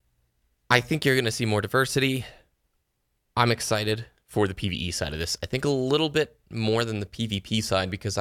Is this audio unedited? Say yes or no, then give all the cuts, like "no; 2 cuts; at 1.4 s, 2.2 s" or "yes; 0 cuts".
yes; 0 cuts